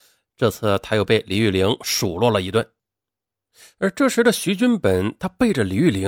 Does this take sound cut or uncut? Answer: uncut